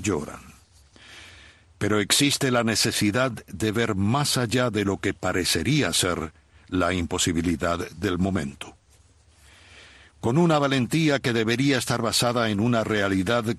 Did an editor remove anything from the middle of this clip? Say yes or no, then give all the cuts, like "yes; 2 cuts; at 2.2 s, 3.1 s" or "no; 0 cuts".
no; 0 cuts